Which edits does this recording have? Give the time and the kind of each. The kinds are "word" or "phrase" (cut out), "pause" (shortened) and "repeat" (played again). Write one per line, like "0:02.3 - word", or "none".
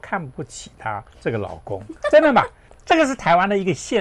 0:01.1 - pause